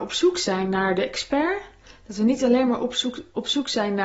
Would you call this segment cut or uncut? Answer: uncut